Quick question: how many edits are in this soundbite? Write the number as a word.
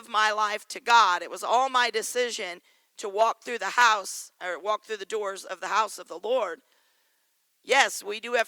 zero